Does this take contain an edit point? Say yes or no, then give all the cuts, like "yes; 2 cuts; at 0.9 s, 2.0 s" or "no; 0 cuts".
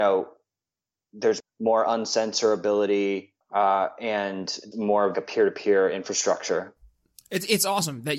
yes; 4 cuts; at 1.4 s, 3.4 s, 4.7 s, 5.1 s